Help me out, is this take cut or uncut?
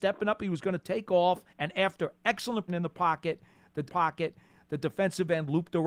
cut